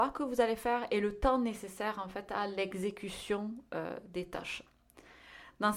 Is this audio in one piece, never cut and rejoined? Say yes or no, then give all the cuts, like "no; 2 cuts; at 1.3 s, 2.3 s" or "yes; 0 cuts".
yes; 0 cuts